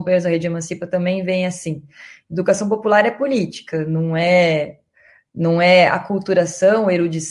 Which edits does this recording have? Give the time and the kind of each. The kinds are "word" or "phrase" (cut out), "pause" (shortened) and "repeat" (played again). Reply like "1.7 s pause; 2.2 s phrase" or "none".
none